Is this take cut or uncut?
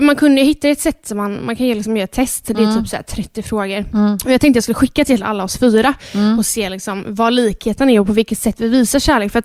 uncut